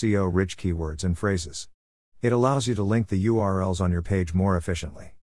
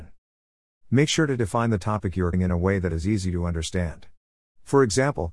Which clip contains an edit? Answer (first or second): second